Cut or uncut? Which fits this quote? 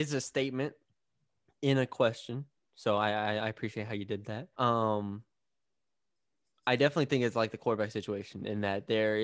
cut